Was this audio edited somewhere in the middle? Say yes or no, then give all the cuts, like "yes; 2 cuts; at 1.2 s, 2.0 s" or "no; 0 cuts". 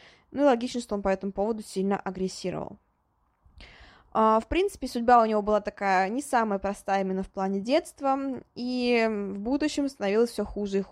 no; 0 cuts